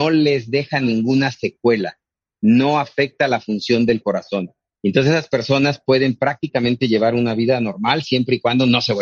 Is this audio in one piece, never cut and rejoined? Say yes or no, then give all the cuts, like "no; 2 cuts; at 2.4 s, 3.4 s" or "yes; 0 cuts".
yes; 0 cuts